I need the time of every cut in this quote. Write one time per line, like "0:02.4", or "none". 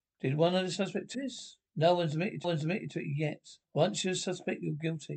0:01.1
0:01.7
0:02.4
0:03.6